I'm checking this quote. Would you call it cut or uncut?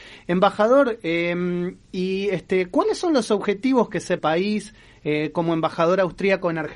cut